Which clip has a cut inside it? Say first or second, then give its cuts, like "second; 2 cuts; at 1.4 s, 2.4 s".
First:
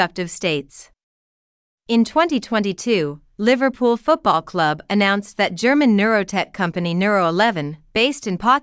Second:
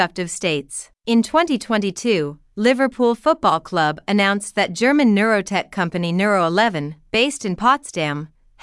second; 1 cut; at 1.0 s